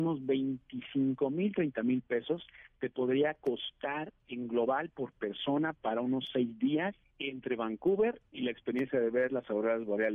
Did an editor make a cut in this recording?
yes; 1 cut; at 7.0 s

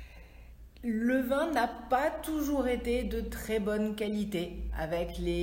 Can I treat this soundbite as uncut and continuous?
yes; 0 cuts

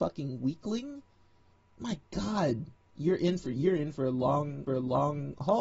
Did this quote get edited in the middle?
yes; 2 cuts; at 1.5 s, 4.7 s

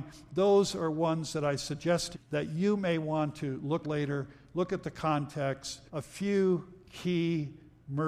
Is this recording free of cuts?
no; 3 cuts; at 2.1 s, 3.8 s, 5.9 s

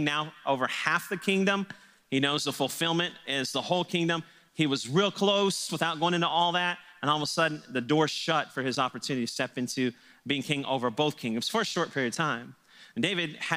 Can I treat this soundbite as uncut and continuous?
yes; 0 cuts

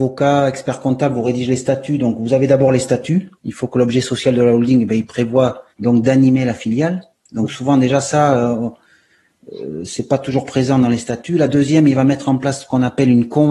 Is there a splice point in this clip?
yes; 2 cuts; at 3.4 s, 5.7 s

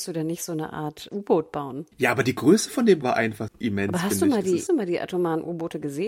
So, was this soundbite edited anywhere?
yes; 4 cuts; at 1.1 s, 3.0 s, 3.5 s, 4.7 s

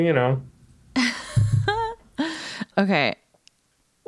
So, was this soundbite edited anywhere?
yes; 1 cut; at 2.7 s

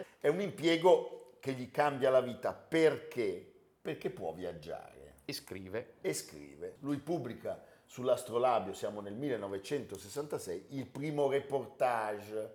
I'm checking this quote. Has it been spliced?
no; 0 cuts

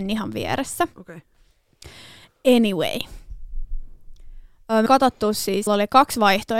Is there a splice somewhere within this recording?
yes; 2 cuts; at 4.9 s, 5.7 s

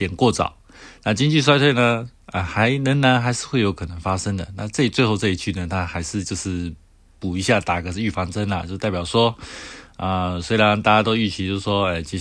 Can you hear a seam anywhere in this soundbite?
no; 0 cuts

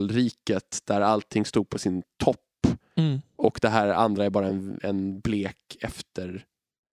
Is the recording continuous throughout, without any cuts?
yes; 0 cuts

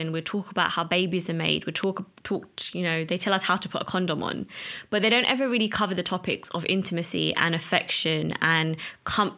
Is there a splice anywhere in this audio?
no; 0 cuts

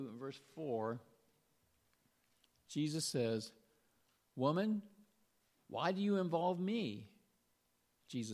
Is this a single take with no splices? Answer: yes; 0 cuts

